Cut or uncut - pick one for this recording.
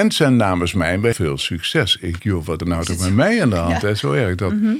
cut